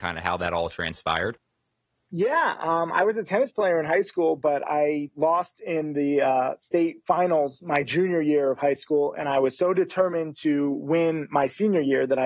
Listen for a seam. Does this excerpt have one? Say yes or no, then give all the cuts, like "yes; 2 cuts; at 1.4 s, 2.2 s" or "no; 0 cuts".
no; 0 cuts